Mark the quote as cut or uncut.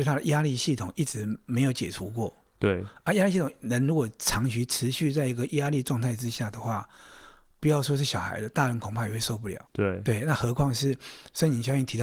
cut